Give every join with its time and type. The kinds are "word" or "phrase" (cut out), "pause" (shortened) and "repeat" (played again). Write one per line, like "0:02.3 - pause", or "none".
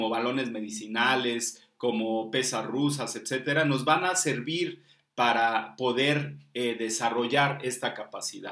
none